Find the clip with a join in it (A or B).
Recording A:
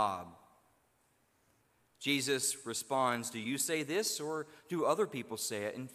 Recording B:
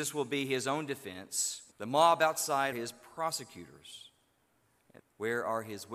B